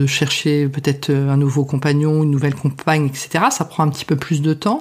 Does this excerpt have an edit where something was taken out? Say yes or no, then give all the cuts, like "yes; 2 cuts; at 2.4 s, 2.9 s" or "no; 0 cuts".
no; 0 cuts